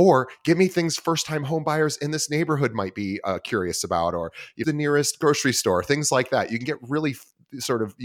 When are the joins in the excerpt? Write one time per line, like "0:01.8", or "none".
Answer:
0:04.6